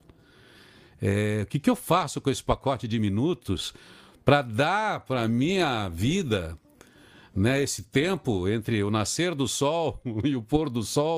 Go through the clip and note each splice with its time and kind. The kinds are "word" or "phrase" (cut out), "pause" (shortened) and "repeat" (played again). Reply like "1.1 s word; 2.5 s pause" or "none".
none